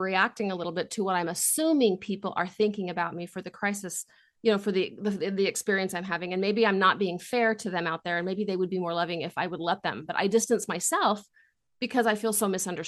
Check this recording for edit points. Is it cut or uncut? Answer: uncut